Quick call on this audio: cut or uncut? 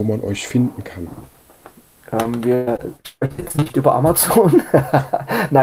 uncut